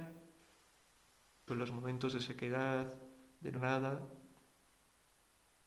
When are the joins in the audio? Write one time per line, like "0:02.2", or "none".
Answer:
0:01.5
0:03.6